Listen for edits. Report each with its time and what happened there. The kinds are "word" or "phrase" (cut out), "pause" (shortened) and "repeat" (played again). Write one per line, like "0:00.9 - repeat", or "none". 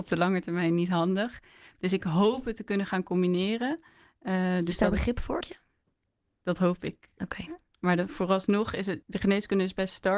0:05.4 - word
0:09.0 - word